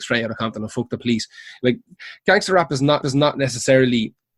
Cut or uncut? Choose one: cut